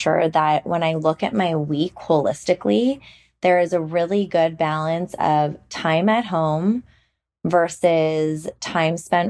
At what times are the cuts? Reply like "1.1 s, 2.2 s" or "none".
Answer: none